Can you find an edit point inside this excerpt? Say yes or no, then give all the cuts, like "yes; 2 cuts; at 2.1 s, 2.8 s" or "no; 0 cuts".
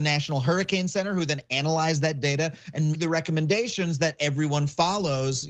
yes; 1 cut; at 2.9 s